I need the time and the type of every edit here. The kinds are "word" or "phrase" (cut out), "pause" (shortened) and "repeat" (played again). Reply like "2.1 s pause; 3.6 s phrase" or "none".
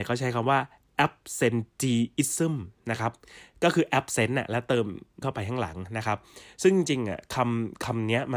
5.2 s word